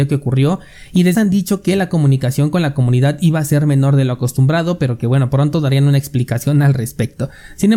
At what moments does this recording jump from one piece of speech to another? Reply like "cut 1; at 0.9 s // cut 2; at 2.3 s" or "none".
cut 1; at 1.1 s